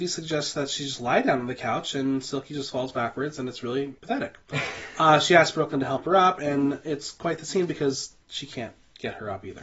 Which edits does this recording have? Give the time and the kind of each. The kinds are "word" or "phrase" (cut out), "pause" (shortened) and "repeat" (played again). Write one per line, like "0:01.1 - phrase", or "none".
0:04.0 - pause
0:08.2 - pause